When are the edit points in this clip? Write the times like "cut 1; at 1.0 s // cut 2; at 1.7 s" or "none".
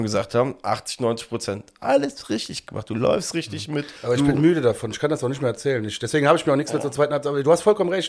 cut 1; at 4.0 s